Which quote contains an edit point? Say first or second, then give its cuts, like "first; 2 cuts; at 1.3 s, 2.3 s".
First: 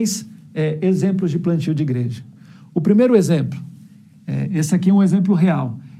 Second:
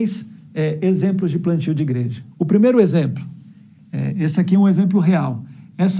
second; 1 cut; at 2.3 s